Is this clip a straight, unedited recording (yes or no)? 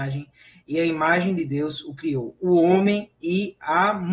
yes